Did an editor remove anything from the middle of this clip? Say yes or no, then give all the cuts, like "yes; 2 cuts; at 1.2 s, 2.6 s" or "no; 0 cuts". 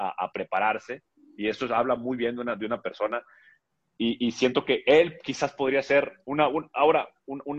no; 0 cuts